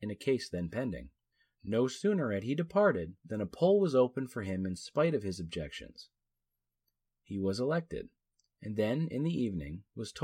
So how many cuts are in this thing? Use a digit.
0